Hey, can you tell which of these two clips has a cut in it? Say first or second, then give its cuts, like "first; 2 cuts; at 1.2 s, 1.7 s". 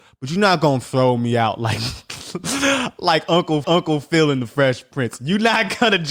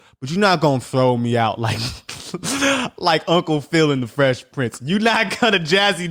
first; 1 cut; at 3.6 s